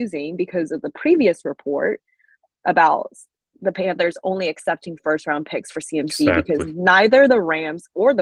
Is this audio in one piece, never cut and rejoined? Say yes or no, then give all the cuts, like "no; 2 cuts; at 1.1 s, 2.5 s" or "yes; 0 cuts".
yes; 0 cuts